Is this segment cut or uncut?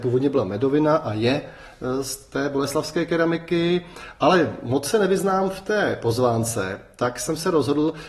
uncut